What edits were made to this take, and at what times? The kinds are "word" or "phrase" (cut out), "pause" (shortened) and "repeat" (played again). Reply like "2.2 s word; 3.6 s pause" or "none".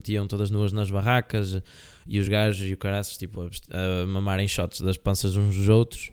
none